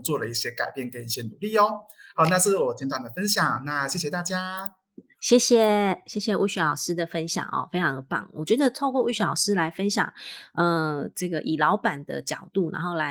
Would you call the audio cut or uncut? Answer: uncut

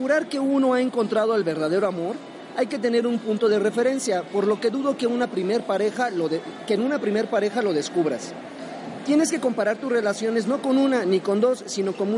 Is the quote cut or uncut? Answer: uncut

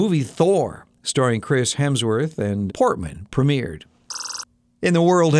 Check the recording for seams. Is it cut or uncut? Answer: cut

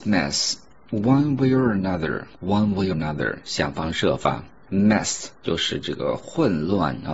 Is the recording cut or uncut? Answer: cut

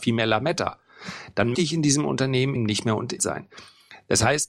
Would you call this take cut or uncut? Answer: cut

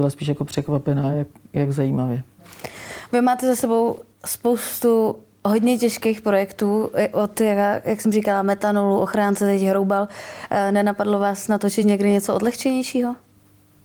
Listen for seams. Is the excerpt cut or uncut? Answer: uncut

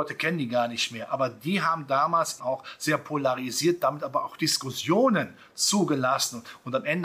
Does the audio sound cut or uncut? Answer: cut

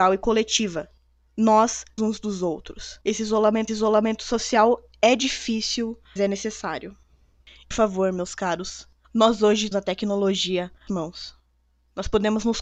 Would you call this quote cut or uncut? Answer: cut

